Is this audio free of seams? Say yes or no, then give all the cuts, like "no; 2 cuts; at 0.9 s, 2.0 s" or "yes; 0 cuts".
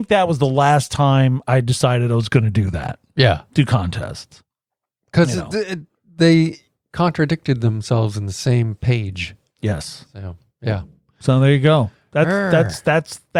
yes; 0 cuts